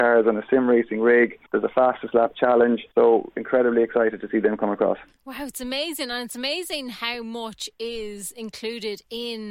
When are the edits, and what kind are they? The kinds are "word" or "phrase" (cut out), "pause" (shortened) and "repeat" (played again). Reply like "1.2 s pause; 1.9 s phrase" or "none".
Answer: 1.5 s pause; 2.9 s pause